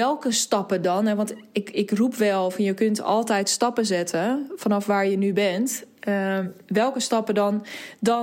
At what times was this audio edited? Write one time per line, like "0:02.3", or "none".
none